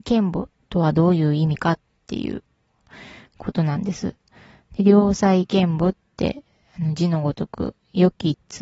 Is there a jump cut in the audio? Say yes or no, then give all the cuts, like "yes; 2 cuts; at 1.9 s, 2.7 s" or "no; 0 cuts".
no; 0 cuts